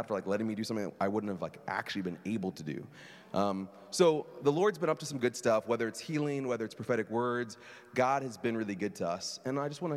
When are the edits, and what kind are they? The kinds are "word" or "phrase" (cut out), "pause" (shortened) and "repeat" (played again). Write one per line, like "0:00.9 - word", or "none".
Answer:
none